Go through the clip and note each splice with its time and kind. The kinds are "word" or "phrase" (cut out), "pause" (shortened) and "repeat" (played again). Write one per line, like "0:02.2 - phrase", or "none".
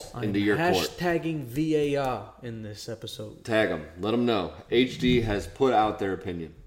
none